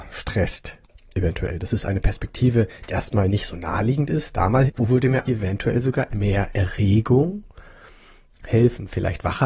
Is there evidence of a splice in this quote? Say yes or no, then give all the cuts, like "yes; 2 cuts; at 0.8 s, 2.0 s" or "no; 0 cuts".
yes; 4 cuts; at 2.9 s, 4.7 s, 5.2 s, 6.1 s